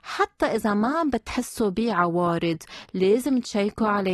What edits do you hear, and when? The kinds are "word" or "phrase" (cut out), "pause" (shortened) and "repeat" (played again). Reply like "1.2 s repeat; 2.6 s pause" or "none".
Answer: none